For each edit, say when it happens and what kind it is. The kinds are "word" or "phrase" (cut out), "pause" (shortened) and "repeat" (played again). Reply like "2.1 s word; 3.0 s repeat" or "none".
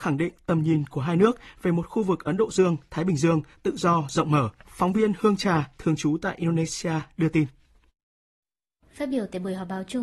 4.6 s pause